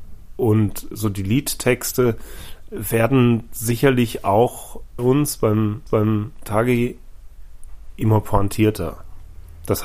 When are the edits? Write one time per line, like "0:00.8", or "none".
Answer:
0:02.7
0:05.0
0:05.9

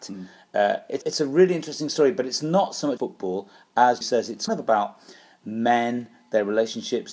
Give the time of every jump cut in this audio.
0:01.0
0:03.0
0:04.0
0:04.5

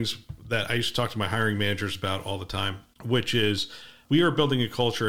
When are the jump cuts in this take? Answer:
0:02.9

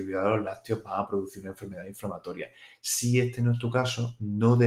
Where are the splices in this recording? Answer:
none

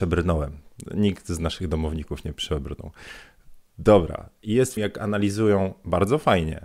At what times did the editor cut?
0:04.8

